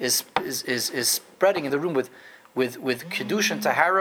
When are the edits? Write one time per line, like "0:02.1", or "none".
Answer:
0:01.7